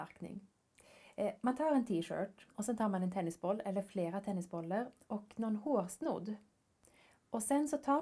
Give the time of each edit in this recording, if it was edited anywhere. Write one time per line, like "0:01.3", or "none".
0:02.5